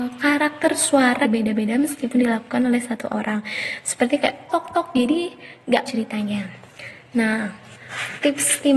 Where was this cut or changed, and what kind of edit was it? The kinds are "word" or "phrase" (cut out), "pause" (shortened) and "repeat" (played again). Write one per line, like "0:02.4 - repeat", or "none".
0:01.2 - word
0:04.5 - word
0:05.9 - word